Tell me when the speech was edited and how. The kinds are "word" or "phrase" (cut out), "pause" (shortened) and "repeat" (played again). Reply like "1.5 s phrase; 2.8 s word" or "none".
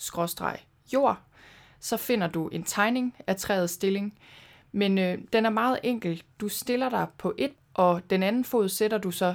7.5 s word